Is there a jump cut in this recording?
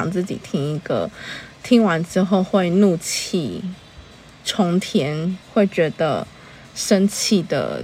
yes; 1 cut; at 5.4 s

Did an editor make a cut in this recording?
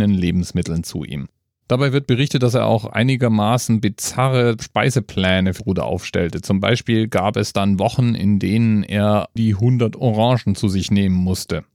yes; 2 cuts; at 5.6 s, 9.4 s

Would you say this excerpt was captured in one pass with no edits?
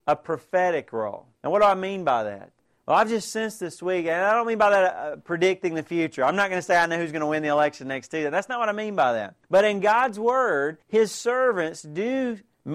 no; 4 cuts; at 1.3 s, 2.6 s, 9.4 s, 10.8 s

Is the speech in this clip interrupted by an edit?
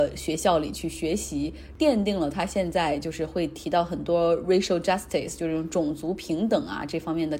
no; 0 cuts

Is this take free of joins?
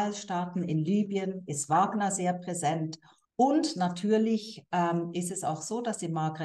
no; 1 cut; at 3.2 s

